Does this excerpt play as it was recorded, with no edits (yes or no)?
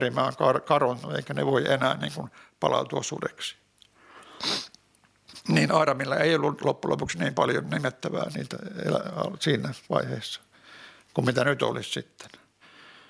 yes